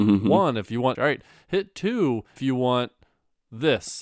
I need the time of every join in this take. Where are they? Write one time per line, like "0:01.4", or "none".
0:00.9
0:02.4